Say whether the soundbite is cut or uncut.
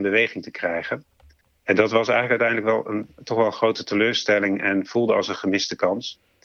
uncut